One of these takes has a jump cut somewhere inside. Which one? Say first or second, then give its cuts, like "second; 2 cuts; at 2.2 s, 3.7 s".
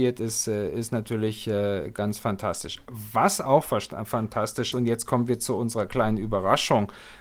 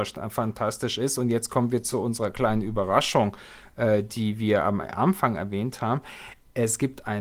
first; 2 cuts; at 1.9 s, 4.7 s